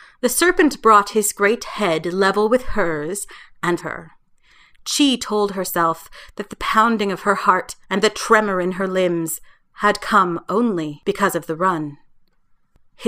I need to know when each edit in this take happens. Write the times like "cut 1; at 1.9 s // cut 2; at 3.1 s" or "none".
cut 1; at 3.8 s // cut 2; at 7.8 s